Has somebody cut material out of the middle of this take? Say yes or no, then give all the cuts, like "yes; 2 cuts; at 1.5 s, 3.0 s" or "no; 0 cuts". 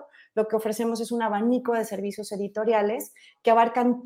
no; 0 cuts